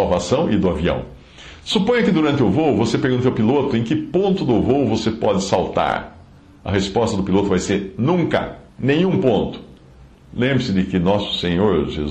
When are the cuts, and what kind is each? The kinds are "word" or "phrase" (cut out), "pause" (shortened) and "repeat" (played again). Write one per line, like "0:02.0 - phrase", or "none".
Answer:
0:08.7 - pause